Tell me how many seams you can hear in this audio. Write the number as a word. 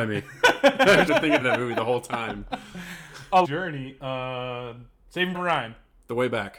four